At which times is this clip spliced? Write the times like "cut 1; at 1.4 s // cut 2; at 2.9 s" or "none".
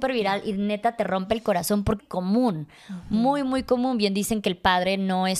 cut 1; at 2.0 s